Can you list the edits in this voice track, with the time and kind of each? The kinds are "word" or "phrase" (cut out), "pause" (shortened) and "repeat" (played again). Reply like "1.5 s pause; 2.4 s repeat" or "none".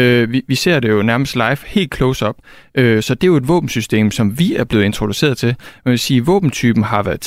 none